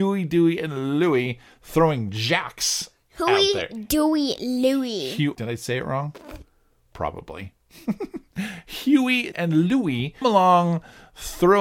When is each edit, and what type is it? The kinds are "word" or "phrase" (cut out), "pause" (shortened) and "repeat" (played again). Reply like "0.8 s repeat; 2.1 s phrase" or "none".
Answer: 5.3 s word; 9.3 s word; 10.2 s word